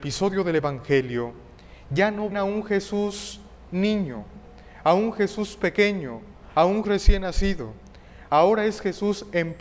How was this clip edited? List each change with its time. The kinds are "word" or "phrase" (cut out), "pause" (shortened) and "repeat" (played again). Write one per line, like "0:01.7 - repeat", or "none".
0:02.3 - word
0:06.8 - word